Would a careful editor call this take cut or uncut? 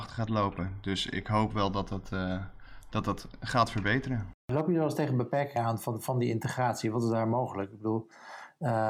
cut